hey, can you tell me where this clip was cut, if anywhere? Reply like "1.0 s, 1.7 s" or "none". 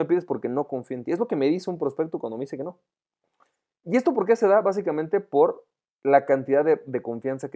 none

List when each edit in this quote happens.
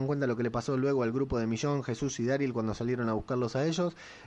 none

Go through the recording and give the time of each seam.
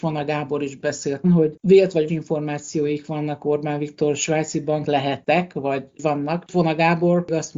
1.2 s, 2.1 s, 4.8 s

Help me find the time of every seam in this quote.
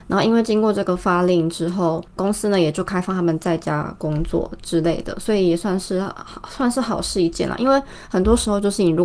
2.1 s

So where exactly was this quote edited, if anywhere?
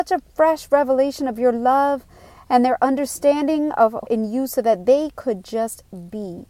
4.1 s

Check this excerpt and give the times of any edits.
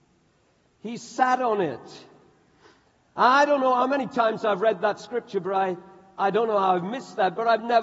none

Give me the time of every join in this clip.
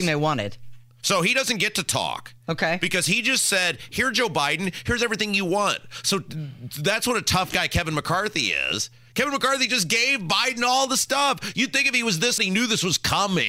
12.4 s

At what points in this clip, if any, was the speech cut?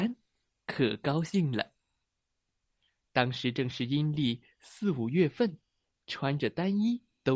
none

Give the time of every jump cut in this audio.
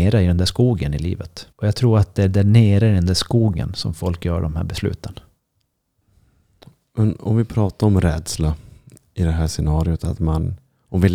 1.5 s

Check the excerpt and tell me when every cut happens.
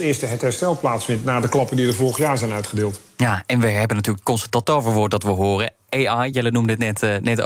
none

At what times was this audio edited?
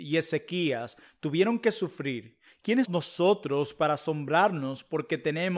2.9 s

